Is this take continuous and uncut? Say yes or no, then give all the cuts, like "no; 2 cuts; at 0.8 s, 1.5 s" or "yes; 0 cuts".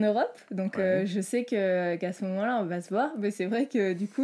yes; 0 cuts